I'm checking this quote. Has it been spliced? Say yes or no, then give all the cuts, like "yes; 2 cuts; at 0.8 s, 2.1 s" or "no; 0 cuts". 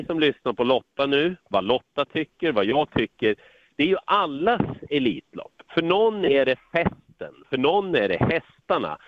no; 0 cuts